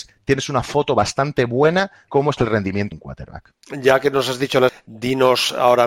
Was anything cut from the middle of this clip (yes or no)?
yes